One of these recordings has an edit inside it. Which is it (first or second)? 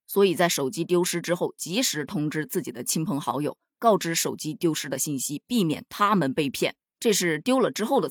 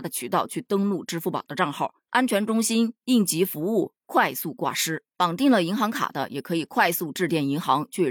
second